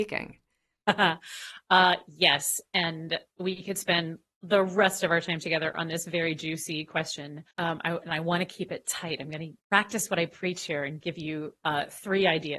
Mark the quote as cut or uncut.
cut